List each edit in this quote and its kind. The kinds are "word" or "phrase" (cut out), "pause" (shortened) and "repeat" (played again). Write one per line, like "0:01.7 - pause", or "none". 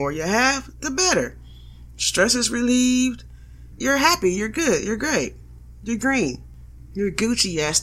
none